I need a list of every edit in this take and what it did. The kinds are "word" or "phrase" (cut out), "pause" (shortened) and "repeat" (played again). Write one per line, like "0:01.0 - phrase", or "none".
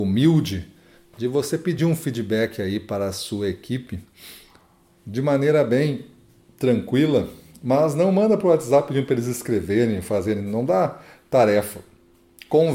none